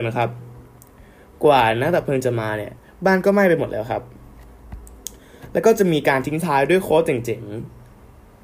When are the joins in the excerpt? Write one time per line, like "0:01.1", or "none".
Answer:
0:02.8